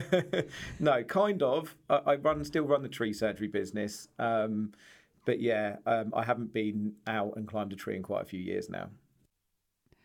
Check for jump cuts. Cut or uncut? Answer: uncut